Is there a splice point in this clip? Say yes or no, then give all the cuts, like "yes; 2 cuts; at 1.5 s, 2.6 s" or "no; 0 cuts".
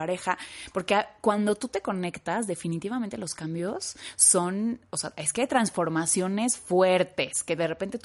no; 0 cuts